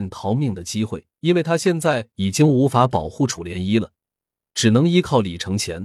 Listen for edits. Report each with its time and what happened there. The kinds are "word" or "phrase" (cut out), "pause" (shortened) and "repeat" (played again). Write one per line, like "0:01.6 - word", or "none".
0:01.1 - pause